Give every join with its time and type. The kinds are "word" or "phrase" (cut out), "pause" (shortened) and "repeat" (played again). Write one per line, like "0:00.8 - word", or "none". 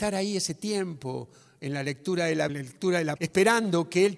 0:02.5 - word
0:03.2 - word